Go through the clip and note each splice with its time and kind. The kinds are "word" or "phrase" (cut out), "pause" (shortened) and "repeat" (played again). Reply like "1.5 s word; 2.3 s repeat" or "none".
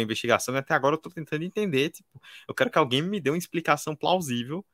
none